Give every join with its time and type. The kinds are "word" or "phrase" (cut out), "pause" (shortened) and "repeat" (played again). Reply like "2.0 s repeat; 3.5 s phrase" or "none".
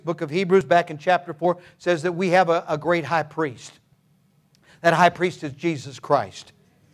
none